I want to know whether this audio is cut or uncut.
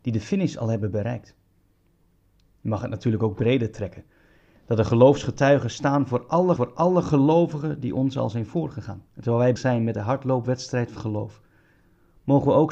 cut